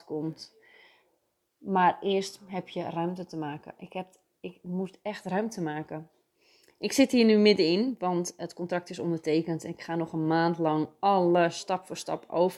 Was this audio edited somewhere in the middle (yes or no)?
no